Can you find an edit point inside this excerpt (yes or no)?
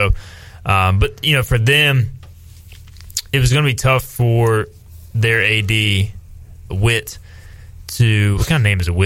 yes